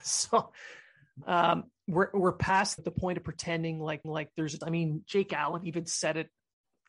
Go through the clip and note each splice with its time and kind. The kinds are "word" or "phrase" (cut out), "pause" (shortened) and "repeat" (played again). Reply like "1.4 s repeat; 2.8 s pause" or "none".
2.8 s word; 4.0 s repeat; 4.6 s word